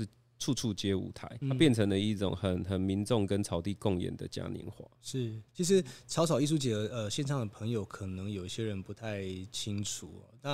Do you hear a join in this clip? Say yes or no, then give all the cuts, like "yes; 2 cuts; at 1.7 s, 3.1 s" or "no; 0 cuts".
yes; 2 cuts; at 1.4 s, 5.5 s